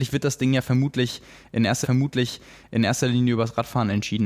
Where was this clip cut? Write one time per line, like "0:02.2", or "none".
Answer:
0:01.8